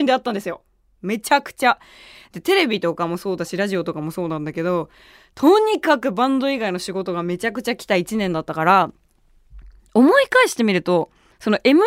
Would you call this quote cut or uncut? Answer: uncut